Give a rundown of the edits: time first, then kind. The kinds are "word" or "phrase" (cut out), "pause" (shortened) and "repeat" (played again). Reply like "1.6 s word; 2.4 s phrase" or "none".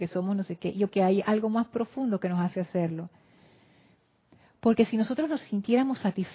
0.9 s word